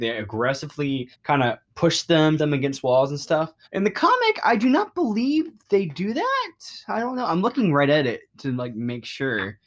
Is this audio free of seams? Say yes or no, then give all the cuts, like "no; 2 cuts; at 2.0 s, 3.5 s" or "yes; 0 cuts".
no; 5 cuts; at 1.1 s, 2.4 s, 3.6 s, 5.6 s, 8.3 s